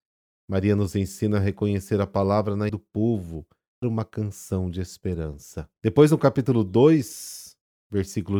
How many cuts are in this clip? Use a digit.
3